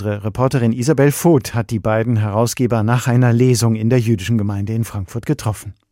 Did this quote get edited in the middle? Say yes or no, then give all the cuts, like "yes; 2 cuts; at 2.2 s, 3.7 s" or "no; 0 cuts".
no; 0 cuts